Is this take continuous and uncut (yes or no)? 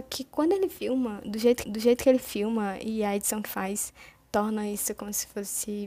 no